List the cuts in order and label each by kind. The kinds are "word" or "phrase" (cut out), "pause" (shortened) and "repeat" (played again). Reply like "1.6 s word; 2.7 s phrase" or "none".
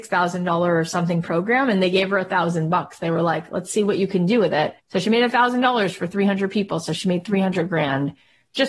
4.8 s pause